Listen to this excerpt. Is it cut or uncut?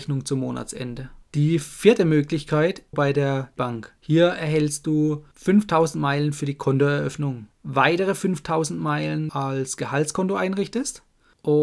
cut